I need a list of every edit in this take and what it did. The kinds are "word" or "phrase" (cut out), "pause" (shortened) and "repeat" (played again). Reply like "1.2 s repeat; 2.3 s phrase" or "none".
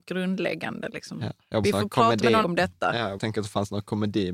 1.6 s phrase; 2.4 s word; 3.2 s word